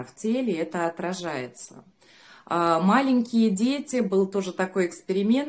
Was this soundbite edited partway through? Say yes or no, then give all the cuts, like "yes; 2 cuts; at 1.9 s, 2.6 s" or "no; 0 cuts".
no; 0 cuts